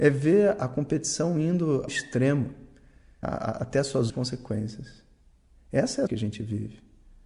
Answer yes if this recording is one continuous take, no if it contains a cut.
no